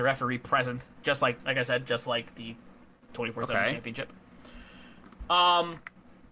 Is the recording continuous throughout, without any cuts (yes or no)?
yes